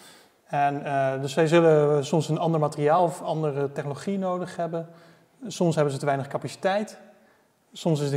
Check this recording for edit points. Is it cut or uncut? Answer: uncut